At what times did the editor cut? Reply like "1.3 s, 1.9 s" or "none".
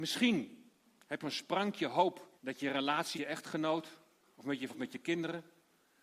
1.2 s, 2.4 s, 3.1 s, 4.7 s